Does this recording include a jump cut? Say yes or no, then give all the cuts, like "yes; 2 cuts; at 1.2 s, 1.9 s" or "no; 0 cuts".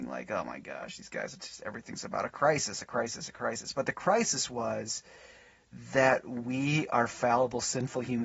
no; 0 cuts